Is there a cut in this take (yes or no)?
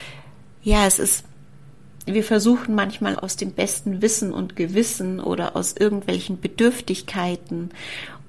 yes